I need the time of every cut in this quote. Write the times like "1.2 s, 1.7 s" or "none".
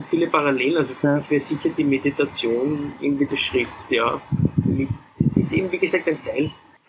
3.3 s